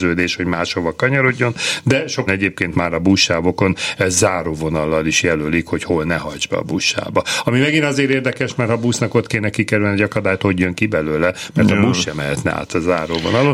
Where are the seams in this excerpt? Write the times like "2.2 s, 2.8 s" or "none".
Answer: 2.3 s, 2.7 s